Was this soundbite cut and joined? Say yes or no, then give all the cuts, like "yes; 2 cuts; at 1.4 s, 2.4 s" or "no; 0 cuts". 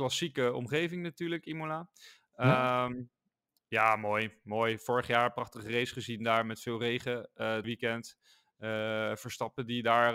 yes; 1 cut; at 7.6 s